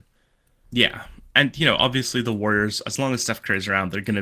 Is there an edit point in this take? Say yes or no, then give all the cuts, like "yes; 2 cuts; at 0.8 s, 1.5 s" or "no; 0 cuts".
no; 0 cuts